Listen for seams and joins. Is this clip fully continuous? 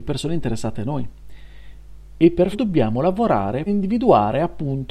no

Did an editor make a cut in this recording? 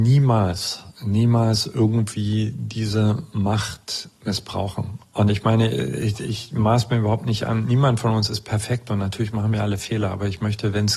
yes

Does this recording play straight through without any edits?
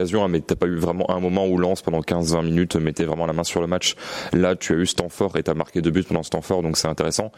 yes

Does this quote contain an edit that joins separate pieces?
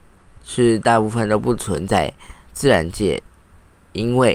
yes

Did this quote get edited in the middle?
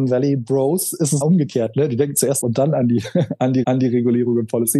yes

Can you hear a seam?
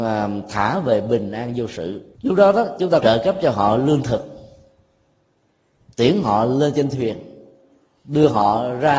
yes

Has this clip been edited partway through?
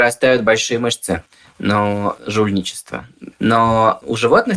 yes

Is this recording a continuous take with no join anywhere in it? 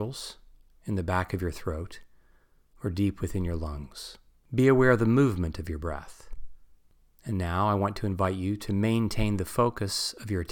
yes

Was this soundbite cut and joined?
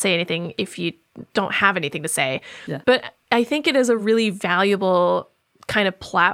no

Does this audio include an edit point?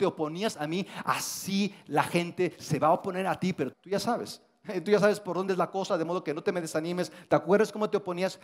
yes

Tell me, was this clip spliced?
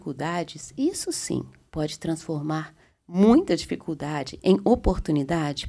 no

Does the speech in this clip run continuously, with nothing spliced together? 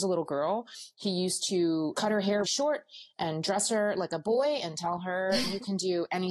no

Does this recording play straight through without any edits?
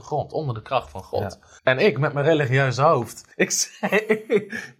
no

